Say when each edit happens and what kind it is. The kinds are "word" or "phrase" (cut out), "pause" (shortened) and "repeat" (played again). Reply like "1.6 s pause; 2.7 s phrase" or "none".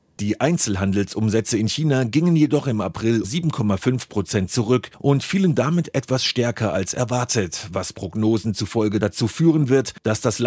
3.2 s word

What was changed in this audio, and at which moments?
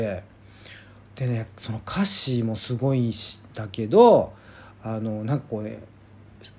none

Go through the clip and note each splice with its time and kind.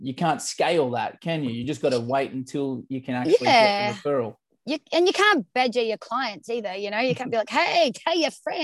none

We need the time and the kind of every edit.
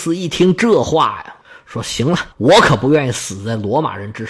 2.3 s pause

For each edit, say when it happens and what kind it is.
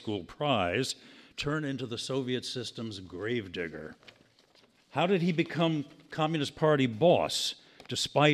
none

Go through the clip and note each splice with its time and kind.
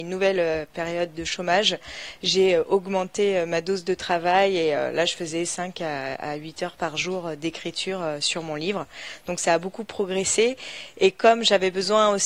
none

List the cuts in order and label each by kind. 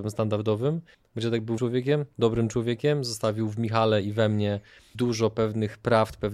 0.9 s pause; 1.6 s word; 4.9 s word

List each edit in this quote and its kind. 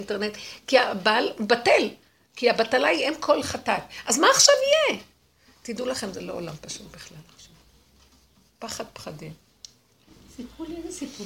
none

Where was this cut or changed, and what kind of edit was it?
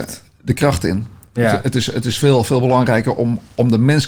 none

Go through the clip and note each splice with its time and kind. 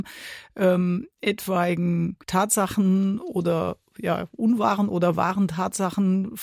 2.2 s pause

